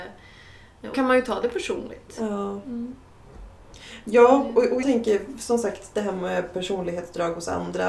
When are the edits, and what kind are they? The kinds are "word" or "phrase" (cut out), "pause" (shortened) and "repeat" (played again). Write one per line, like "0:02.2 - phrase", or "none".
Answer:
0:00.9 - word
0:04.8 - word